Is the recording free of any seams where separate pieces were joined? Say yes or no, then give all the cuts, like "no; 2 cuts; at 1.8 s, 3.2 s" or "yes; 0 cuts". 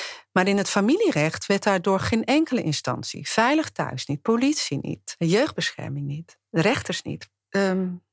yes; 0 cuts